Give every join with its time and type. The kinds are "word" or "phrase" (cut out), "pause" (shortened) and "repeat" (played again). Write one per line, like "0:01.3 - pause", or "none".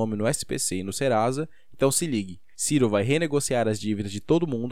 0:02.5 - pause